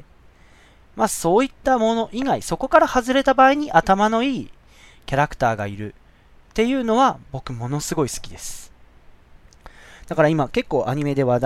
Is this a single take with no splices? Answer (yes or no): yes